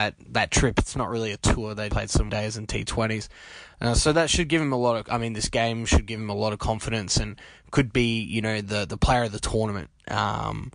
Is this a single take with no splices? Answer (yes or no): no